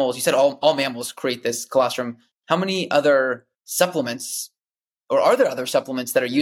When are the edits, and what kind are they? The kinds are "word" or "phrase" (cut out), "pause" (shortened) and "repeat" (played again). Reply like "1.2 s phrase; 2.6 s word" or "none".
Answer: none